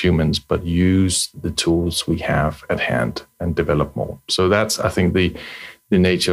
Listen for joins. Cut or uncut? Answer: uncut